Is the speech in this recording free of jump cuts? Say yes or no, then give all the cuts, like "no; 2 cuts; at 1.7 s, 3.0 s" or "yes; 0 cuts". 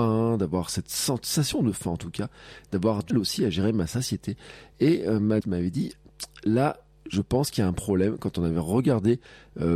no; 2 cuts; at 3.1 s, 5.4 s